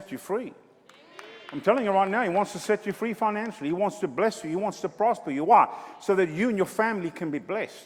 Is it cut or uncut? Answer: uncut